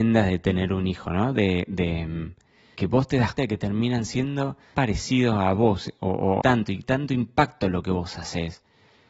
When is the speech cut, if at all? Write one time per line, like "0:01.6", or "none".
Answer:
0:02.7
0:03.4
0:04.7
0:06.4
0:06.8